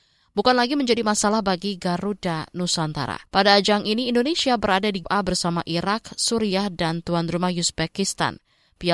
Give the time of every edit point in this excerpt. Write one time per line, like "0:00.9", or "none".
0:03.3
0:05.0